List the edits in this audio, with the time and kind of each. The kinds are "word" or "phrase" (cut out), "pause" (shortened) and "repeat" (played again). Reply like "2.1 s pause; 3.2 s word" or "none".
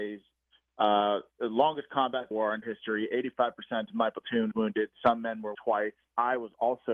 2.3 s phrase; 2.6 s word; 4.5 s word; 5.5 s word